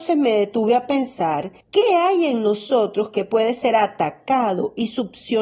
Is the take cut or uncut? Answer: cut